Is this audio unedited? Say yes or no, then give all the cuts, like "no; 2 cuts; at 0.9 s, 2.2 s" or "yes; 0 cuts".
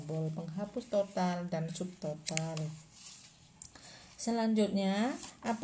yes; 0 cuts